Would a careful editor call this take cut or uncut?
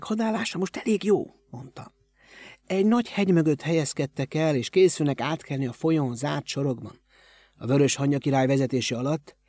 uncut